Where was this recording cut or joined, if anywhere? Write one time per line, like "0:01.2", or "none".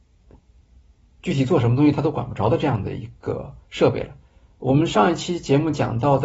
0:03.6